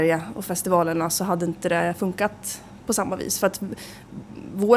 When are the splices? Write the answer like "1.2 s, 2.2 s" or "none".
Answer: none